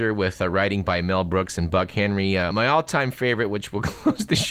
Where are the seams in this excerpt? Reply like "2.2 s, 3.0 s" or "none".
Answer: 2.5 s